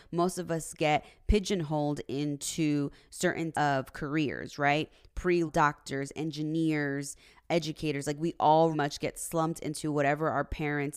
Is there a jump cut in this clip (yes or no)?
yes